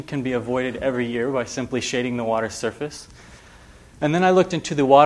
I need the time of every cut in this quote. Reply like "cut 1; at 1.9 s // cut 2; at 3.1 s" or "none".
none